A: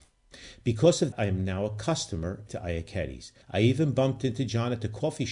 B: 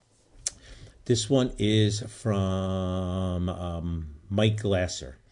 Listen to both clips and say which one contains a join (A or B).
A